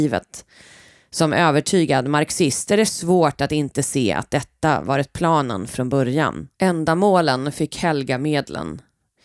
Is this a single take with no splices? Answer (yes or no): no